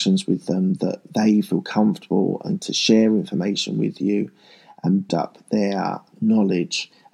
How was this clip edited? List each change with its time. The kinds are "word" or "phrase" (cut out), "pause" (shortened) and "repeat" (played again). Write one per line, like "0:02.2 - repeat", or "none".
0:02.6 - word
0:05.1 - word